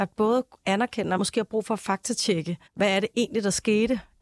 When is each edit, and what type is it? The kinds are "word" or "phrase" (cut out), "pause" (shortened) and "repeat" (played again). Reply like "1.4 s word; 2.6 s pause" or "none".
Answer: 1.2 s word; 2.7 s pause